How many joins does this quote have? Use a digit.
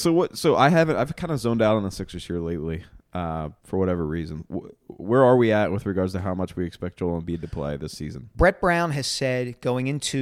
1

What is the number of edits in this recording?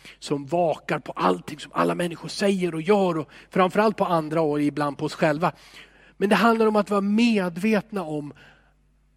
0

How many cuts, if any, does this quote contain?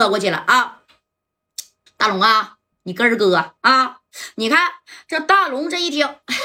3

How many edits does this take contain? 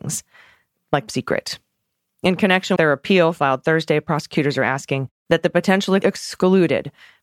4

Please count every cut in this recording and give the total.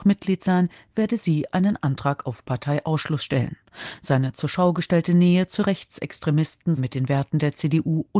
1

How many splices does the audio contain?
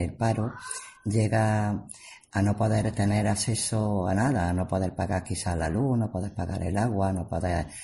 0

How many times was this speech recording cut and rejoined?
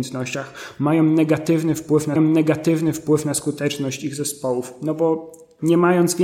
1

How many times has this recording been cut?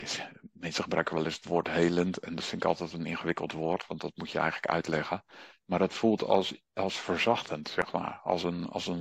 0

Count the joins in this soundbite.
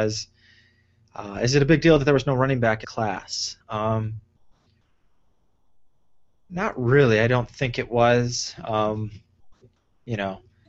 2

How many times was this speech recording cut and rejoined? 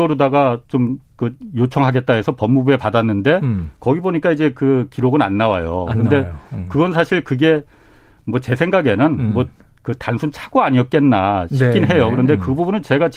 0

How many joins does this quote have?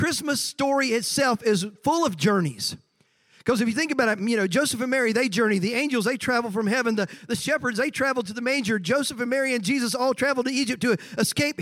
0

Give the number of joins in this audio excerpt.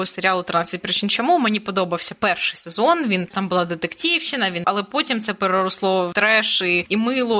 2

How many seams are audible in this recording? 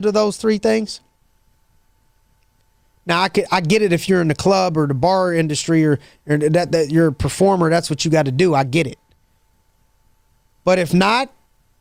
0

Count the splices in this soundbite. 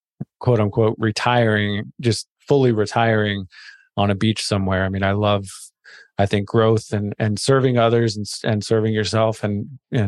0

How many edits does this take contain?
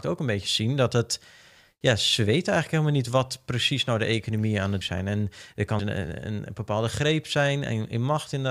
2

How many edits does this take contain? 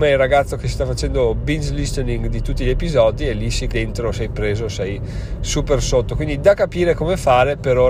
1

